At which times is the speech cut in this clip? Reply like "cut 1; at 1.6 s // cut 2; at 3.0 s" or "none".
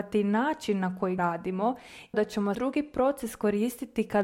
cut 1; at 1.2 s // cut 2; at 2.1 s // cut 3; at 2.5 s